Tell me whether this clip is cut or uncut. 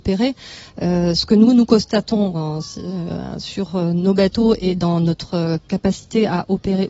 uncut